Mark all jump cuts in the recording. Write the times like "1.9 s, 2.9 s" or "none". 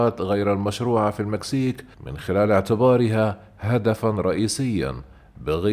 1.9 s